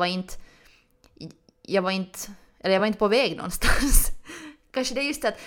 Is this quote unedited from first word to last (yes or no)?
yes